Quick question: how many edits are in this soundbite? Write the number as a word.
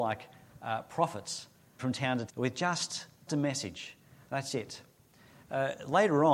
three